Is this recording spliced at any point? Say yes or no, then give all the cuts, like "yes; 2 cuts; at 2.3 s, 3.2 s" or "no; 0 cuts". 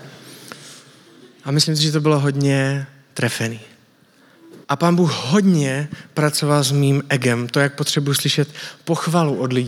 yes; 1 cut; at 4.6 s